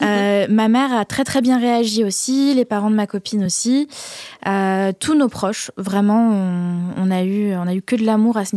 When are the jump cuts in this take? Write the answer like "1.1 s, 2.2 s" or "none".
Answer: none